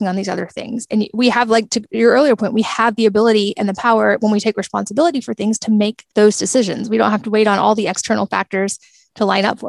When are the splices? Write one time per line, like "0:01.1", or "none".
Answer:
0:06.1